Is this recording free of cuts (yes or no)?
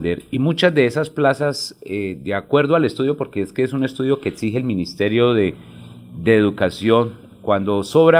yes